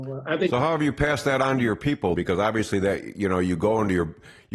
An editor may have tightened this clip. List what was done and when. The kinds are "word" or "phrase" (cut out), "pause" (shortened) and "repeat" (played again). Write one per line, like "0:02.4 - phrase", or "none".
0:02.2 - word